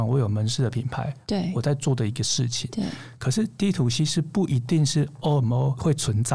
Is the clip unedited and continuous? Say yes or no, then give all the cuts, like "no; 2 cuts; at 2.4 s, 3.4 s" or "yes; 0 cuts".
yes; 0 cuts